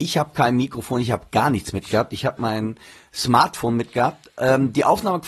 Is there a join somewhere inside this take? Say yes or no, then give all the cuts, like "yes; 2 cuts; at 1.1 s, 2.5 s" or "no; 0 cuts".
no; 0 cuts